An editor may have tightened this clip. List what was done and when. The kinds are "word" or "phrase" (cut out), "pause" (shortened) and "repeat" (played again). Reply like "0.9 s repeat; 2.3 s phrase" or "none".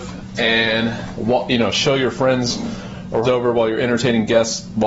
3.2 s word